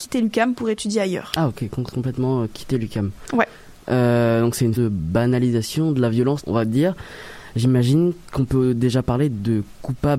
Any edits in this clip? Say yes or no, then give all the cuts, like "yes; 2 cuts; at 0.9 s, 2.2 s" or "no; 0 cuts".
yes; 3 cuts; at 1.9 s, 4.8 s, 6.4 s